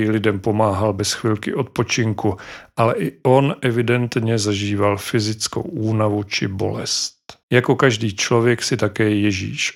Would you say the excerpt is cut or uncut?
cut